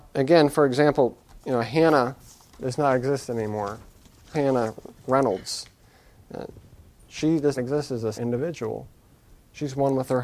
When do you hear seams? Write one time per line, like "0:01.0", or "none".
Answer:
0:02.5
0:04.3
0:07.6
0:08.1